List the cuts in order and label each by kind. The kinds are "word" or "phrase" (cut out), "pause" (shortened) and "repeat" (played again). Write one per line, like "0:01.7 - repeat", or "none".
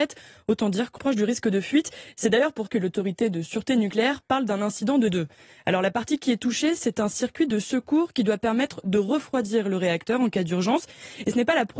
0:01.0 - word
0:02.7 - word
0:05.1 - word